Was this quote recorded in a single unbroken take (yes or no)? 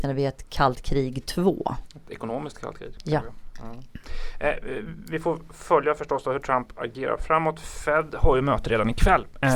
yes